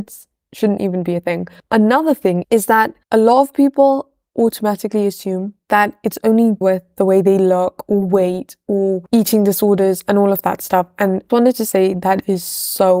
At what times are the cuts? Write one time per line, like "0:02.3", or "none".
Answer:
0:02.4
0:03.0
0:06.6
0:11.3

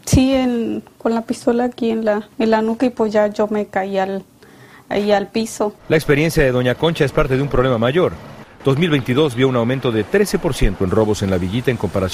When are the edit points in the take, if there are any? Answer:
0:05.8

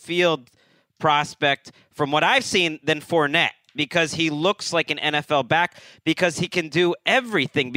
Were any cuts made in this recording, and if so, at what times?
none

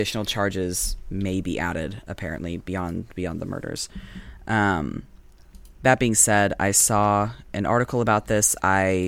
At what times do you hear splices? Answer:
none

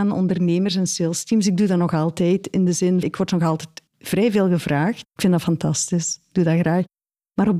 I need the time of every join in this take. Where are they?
0:03.0
0:03.9
0:05.1

